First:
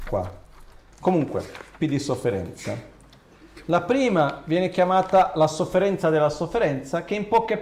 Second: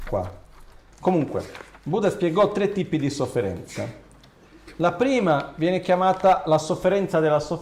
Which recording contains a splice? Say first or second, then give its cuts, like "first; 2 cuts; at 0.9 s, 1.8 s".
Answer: first; 1 cut; at 1.8 s